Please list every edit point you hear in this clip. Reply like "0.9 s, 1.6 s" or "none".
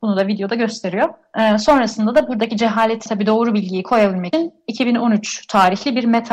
3.1 s, 4.3 s